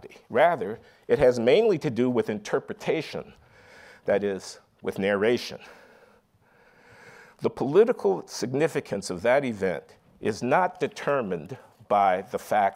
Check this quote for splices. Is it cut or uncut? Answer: uncut